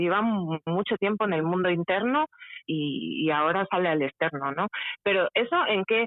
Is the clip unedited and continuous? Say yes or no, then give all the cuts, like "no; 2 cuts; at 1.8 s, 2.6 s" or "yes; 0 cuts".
yes; 0 cuts